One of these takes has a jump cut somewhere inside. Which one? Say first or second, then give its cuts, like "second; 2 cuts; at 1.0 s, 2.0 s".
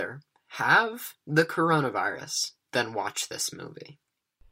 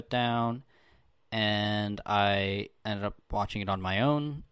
second; 1 cut; at 2.8 s